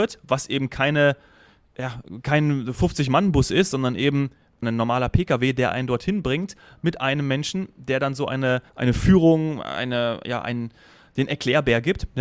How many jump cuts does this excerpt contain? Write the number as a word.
two